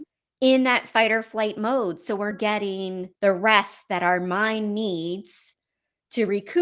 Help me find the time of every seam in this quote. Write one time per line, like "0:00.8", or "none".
0:02.3
0:03.1

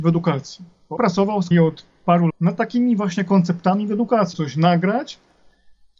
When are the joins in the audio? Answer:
0:01.0
0:01.5
0:02.3
0:04.3

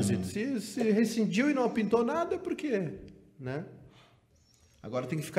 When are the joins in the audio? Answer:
none

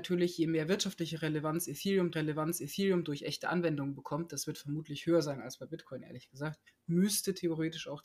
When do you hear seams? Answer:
0:02.1
0:06.7

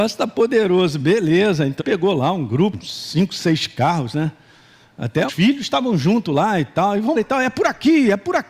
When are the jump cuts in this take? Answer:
0:01.8
0:02.7
0:05.3
0:07.1

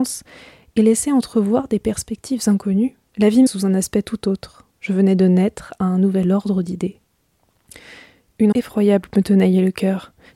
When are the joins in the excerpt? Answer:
0:03.1
0:03.5
0:04.7
0:08.5

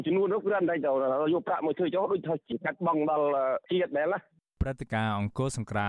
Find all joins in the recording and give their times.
none

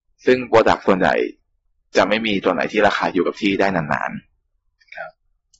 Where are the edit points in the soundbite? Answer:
none

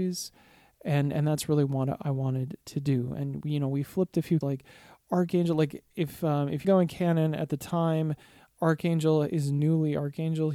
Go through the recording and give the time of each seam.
0:04.4
0:06.6

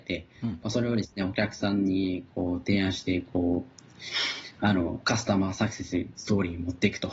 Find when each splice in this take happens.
none

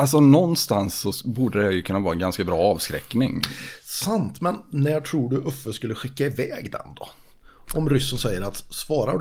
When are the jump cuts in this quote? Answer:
none

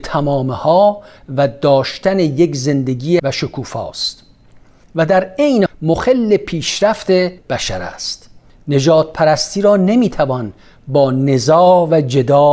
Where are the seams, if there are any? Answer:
0:03.2
0:05.7
0:07.4

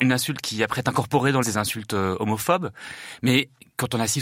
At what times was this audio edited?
0:01.4

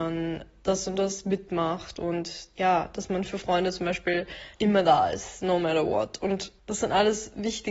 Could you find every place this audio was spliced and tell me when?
0:04.5
0:06.6

